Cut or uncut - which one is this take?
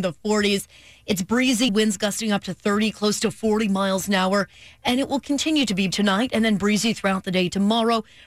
cut